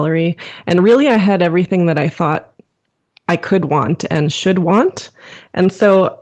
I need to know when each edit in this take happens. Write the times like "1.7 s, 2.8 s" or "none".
none